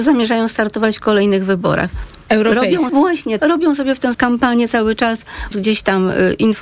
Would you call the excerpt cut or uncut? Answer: cut